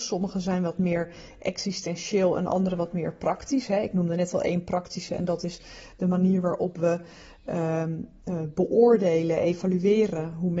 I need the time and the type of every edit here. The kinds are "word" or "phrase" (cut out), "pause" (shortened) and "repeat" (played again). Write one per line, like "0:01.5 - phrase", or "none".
none